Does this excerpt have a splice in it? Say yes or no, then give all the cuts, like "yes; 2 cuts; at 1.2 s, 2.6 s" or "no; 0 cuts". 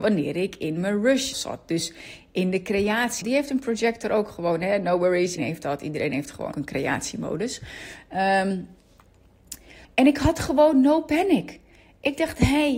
yes; 5 cuts; at 1.3 s, 3.2 s, 5.4 s, 6.5 s, 9.8 s